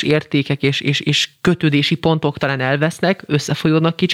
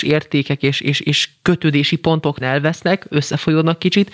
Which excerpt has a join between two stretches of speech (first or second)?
second